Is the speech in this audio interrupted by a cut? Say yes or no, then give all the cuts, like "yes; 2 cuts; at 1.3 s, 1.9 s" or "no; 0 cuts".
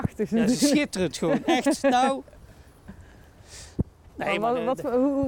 no; 0 cuts